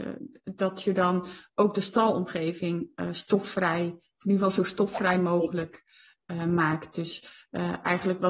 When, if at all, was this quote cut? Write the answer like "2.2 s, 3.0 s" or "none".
none